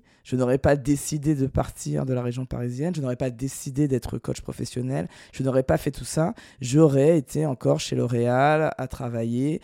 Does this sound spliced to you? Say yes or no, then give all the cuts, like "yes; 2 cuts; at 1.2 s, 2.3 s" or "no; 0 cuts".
no; 0 cuts